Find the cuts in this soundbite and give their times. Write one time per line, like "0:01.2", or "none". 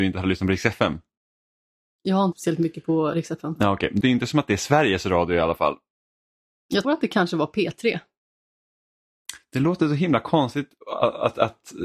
0:02.3
0:04.0
0:06.8